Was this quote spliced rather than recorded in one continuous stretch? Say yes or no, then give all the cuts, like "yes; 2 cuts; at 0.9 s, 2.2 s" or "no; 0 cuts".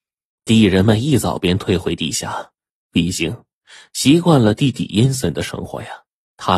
no; 0 cuts